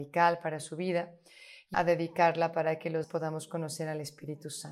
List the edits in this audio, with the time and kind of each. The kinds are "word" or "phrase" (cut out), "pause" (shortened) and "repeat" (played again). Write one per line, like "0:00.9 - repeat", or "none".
0:01.7 - word
0:03.0 - word

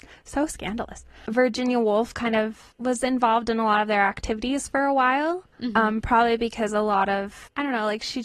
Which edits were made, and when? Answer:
0:02.7 - pause
0:05.5 - pause

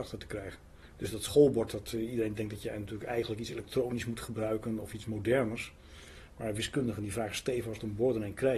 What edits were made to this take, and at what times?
none

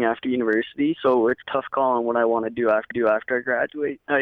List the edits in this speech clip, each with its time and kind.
0:01.4 - phrase
0:02.9 - repeat

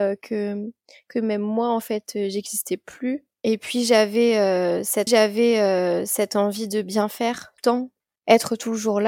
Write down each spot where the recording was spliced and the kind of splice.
0:05.1 - repeat
0:07.6 - word

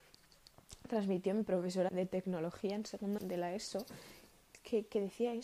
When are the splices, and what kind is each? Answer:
0:01.9 - word
0:03.2 - word

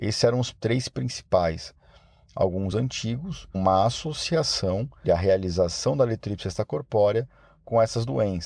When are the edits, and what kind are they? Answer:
0:02.7 - word
0:03.5 - word
0:05.0 - word

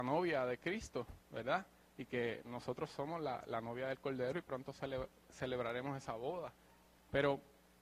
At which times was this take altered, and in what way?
none

